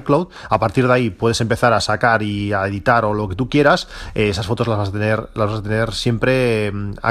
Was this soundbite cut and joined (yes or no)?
no